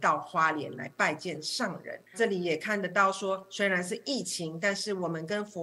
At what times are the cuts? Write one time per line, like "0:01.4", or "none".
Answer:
0:02.1